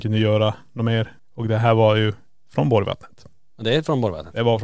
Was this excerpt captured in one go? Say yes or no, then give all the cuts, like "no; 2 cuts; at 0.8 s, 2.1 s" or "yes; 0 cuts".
yes; 0 cuts